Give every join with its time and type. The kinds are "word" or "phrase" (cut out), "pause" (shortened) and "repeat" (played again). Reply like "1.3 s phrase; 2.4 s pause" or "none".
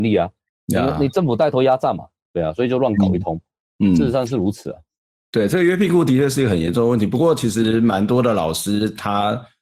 none